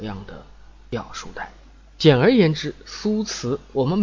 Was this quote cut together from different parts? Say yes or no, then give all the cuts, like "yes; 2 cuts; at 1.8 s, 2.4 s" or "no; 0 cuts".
no; 0 cuts